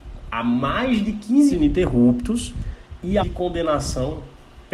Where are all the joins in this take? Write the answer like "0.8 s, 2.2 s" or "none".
1.5 s, 3.2 s